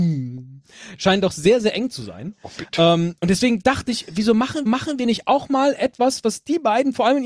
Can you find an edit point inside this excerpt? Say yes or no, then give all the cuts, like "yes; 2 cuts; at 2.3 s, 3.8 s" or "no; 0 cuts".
yes; 1 cut; at 4.7 s